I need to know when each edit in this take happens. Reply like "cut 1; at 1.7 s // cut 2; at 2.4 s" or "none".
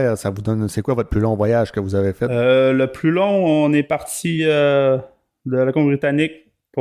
none